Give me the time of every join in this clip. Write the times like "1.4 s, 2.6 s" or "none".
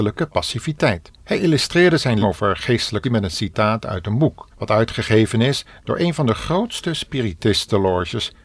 1.1 s, 2.2 s, 3.0 s, 4.5 s